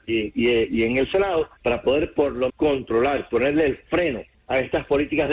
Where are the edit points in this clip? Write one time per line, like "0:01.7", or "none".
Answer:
0:01.6
0:02.5
0:04.3